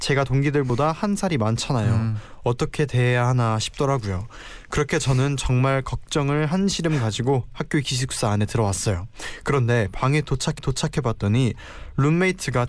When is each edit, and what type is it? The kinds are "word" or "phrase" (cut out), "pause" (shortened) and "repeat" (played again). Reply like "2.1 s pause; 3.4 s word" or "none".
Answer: 10.6 s repeat